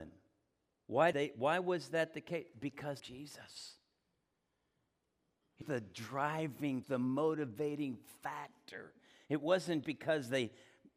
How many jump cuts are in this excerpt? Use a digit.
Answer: 5